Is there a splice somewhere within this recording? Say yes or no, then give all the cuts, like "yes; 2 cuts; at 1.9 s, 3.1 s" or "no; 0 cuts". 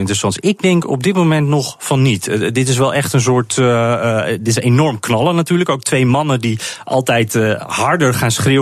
no; 0 cuts